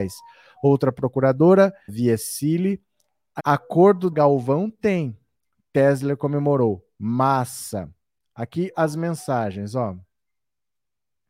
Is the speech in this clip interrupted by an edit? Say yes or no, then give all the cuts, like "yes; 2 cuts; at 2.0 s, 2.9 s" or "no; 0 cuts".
yes; 4 cuts; at 1.9 s, 3.4 s, 4.1 s, 8.7 s